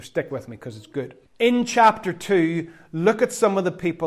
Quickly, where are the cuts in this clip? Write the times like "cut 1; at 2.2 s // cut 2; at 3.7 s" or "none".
cut 1; at 1.3 s